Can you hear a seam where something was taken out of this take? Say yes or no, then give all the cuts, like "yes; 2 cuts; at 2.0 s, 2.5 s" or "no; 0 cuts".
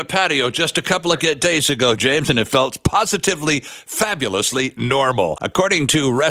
no; 0 cuts